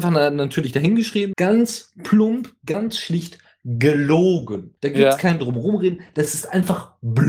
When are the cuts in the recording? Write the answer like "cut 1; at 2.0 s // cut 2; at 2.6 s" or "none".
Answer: cut 1; at 1.3 s // cut 2; at 4.8 s